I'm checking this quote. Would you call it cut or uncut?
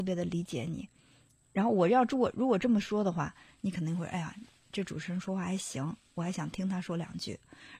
uncut